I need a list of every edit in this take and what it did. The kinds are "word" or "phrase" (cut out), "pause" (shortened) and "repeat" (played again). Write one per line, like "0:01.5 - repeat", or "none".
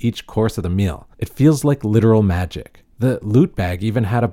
0:01.1 - pause
0:02.9 - pause